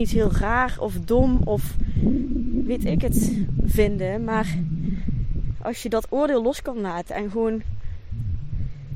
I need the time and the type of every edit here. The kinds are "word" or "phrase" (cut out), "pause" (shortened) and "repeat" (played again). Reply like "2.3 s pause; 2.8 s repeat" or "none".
none